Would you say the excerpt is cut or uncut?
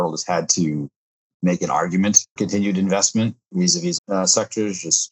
cut